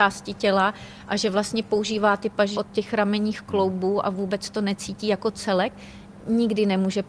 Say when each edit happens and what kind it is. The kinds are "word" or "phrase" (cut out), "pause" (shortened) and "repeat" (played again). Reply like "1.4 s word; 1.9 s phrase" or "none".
2.5 s word